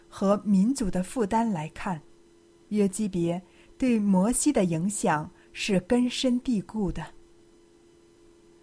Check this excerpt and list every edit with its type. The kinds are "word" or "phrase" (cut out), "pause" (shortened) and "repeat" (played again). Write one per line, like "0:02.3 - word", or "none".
none